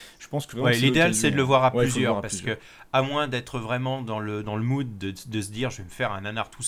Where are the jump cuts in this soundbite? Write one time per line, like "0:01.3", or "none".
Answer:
none